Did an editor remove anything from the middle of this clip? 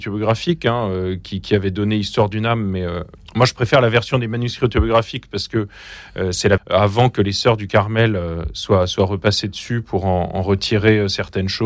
yes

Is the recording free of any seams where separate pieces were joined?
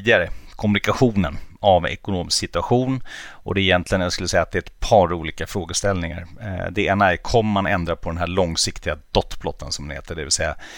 yes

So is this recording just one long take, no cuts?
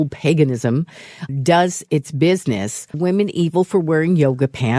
no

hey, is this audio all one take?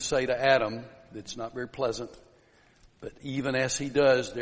yes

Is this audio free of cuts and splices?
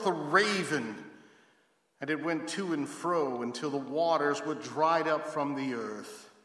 yes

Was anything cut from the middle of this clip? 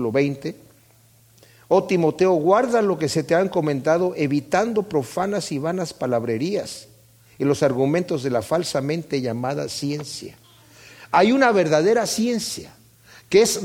no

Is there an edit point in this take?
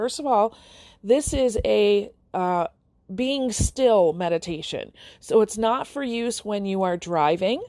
no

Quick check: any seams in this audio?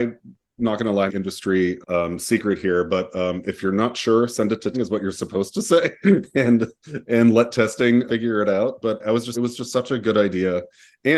yes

